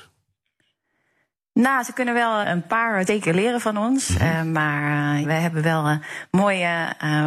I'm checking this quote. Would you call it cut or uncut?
cut